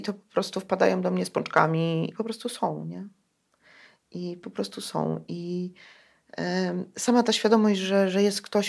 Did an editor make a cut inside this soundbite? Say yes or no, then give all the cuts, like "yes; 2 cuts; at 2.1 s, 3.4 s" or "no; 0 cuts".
yes; 1 cut; at 2.1 s